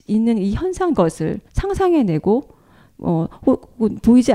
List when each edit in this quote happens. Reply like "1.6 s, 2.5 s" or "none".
0.9 s, 1.5 s